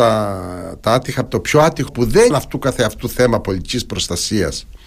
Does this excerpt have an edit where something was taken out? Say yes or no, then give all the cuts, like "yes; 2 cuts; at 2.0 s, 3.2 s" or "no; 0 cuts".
yes; 3 cuts; at 1.3 s, 1.9 s, 2.3 s